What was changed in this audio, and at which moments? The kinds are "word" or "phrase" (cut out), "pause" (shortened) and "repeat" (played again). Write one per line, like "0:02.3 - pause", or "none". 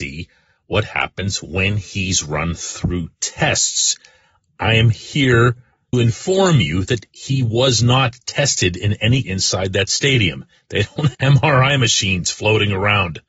0:05.9 - word
0:09.2 - word
0:11.1 - word